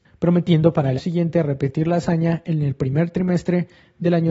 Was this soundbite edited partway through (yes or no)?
yes